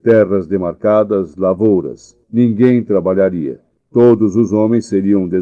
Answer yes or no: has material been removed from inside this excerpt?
yes